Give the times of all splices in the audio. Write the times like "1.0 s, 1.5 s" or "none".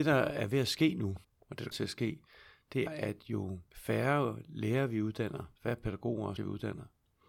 1.2 s, 1.7 s, 2.9 s, 3.7 s, 5.6 s, 6.4 s